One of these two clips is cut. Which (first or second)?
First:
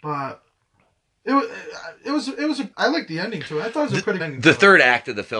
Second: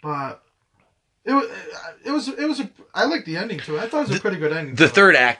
first